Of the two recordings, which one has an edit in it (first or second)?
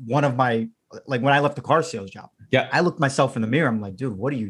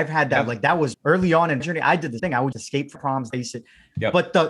second